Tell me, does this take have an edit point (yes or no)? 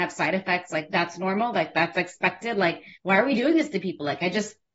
yes